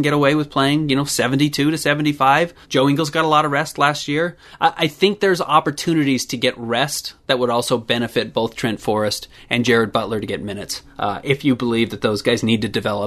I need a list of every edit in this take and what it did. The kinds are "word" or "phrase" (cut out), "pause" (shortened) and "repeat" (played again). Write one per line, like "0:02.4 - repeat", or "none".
0:02.6 - pause